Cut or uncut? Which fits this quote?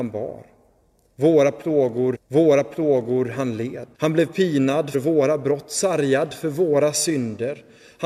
cut